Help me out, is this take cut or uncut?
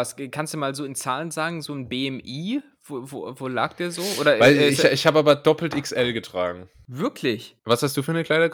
cut